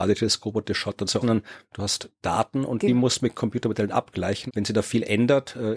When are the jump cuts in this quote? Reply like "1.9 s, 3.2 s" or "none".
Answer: 1.2 s, 4.5 s